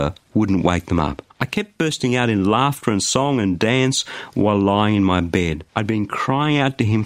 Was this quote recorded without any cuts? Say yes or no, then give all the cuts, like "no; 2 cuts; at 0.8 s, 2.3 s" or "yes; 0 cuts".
no; 2 cuts; at 1.3 s, 5.7 s